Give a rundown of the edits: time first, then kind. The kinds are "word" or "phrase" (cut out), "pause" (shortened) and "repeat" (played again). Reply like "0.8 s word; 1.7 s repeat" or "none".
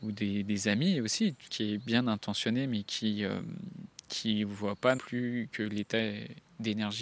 1.5 s phrase; 5.0 s word

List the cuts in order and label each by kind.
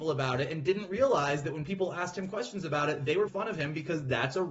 3.3 s word

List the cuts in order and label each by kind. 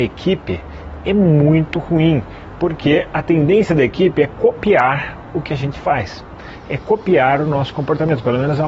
none

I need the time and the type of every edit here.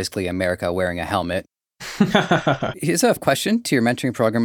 2.7 s word; 3.2 s word

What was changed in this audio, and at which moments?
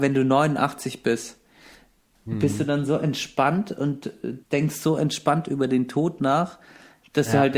4.4 s pause

